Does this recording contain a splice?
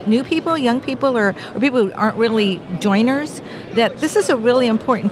no; 0 cuts

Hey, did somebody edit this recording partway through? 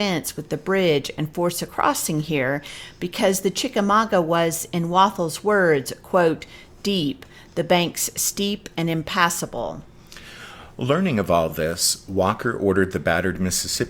no; 0 cuts

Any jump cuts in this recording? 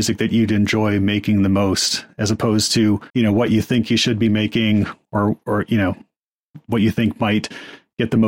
yes; 1 cut; at 3.1 s

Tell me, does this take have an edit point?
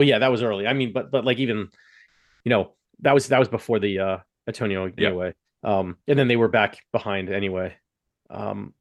yes; 3 cuts; at 5.0 s, 5.4 s, 6.0 s

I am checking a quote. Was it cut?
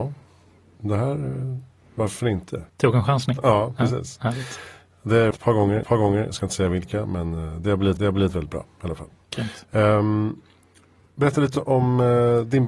yes; 4 cuts; at 2.7 s, 5.3 s, 5.8 s, 8.0 s

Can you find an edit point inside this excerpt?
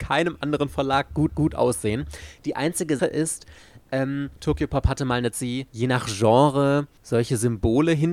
yes; 6 cuts; at 1.3 s, 3.0 s, 4.3 s, 5.3 s, 5.7 s, 7.0 s

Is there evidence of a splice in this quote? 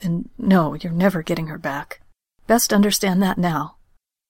no; 0 cuts

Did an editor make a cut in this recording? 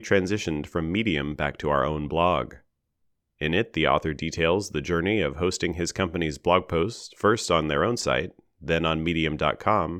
no; 0 cuts

